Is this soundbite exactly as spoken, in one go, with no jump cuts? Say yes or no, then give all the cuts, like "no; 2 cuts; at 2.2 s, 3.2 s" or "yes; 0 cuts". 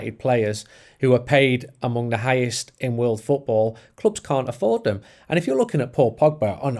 yes; 0 cuts